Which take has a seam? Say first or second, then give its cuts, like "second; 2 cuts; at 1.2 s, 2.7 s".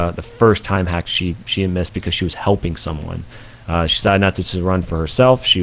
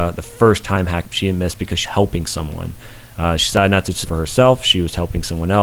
second; 3 cuts; at 1.0 s, 1.8 s, 4.0 s